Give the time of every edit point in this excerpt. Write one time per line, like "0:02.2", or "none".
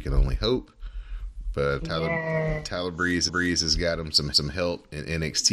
0:01.8
0:03.3
0:04.3